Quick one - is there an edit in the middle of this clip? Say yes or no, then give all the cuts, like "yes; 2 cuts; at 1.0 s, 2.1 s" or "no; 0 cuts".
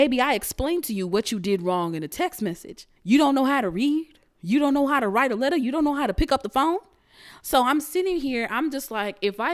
yes; 1 cut; at 3.0 s